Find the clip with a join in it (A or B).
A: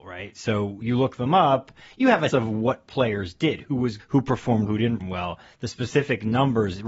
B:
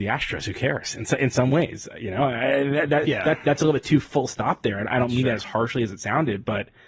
A